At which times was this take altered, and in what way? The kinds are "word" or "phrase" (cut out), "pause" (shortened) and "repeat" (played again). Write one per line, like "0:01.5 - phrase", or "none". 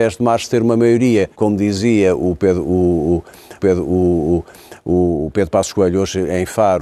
0:01.3 - pause
0:03.6 - repeat

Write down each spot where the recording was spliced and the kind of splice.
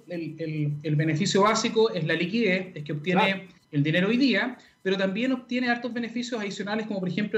0:03.6 - pause

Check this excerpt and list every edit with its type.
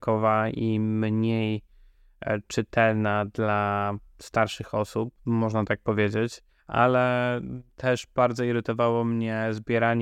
0:05.2 - pause
0:06.5 - pause

